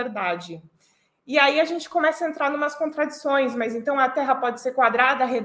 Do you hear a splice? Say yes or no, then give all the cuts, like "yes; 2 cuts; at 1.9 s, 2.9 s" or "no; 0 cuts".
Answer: no; 0 cuts